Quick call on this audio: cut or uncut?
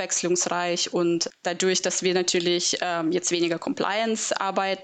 uncut